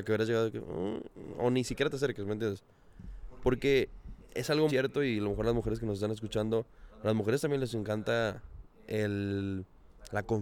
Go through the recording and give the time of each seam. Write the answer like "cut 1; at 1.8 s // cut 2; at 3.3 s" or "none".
cut 1; at 4.7 s